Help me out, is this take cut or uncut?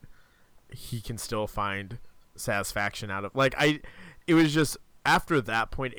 uncut